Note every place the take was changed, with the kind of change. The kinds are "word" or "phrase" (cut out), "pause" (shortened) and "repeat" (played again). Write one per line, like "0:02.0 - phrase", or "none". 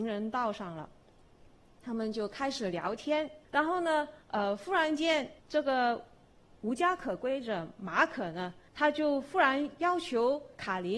0:03.4 - pause
0:04.2 - pause
0:05.4 - pause
0:08.7 - pause